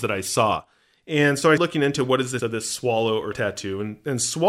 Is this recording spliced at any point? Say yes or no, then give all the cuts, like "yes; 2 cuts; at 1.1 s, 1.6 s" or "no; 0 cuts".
yes; 3 cuts; at 1.6 s, 2.4 s, 3.3 s